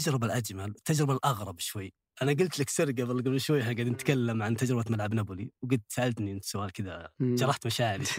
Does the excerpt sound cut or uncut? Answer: cut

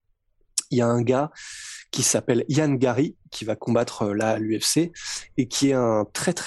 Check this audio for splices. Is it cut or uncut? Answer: uncut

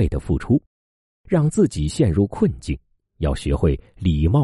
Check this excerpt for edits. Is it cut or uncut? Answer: cut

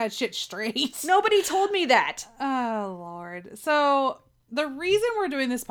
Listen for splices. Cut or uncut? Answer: uncut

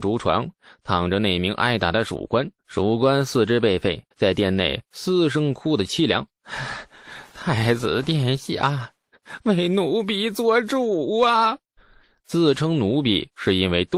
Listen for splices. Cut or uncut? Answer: cut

